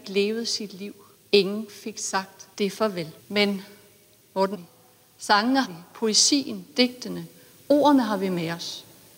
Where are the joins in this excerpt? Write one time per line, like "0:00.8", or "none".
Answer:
0:01.1
0:02.5
0:03.2
0:04.5
0:05.6